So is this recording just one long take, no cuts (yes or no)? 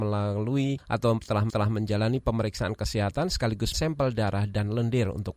no